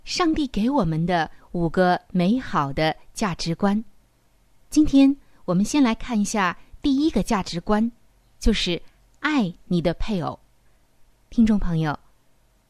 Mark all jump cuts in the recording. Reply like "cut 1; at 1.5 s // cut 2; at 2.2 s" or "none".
none